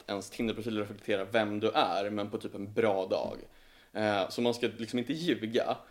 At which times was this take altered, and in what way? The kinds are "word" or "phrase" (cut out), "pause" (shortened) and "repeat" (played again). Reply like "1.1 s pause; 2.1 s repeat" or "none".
none

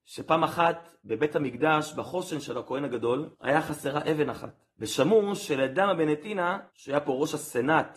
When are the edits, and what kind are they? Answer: 1.0 s pause; 3.3 s pause; 4.7 s pause; 6.7 s pause

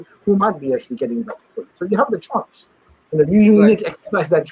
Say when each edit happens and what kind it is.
none

